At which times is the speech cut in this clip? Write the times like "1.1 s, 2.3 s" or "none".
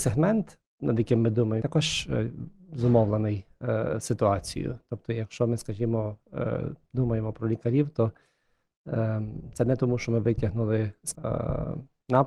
1.6 s, 11.1 s